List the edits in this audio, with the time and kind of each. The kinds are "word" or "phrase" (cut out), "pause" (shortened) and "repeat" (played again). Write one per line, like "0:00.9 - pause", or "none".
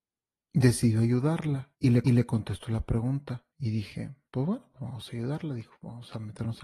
0:01.7 - pause
0:02.0 - repeat
0:03.5 - pause
0:04.2 - pause